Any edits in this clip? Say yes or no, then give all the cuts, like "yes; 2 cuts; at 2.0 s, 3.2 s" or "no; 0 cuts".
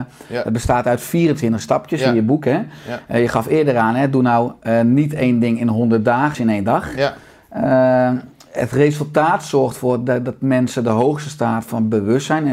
yes; 1 cut; at 6.3 s